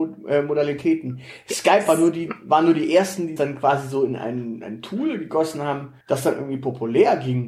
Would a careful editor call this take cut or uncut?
cut